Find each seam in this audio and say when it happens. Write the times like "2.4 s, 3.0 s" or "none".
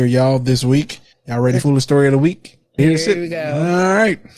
1.1 s, 1.6 s, 2.8 s